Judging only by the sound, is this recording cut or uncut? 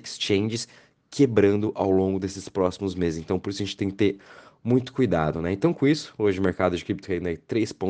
uncut